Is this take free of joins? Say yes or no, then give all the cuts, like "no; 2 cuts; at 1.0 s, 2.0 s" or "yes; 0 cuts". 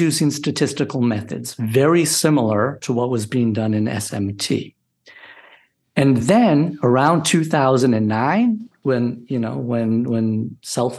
yes; 0 cuts